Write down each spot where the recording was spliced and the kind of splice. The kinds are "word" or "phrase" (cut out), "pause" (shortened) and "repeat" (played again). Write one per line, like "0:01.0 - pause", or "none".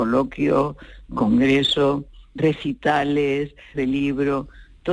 0:02.4 - word
0:03.7 - word